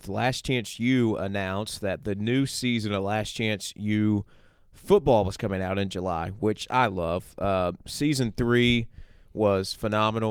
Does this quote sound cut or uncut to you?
uncut